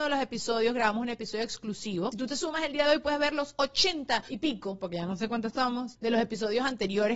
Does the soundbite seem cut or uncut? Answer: uncut